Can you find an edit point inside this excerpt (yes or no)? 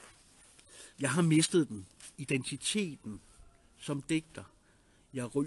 yes